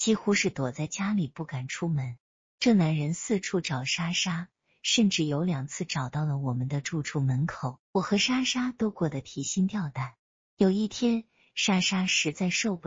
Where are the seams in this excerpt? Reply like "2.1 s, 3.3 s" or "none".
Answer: 7.8 s